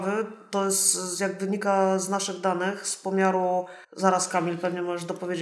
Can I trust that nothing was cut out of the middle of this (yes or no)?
no